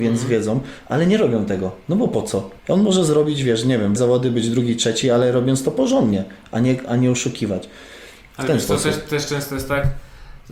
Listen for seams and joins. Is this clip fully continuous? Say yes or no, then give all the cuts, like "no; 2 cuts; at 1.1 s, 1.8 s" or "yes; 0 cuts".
no; 2 cuts; at 2.6 s, 4.0 s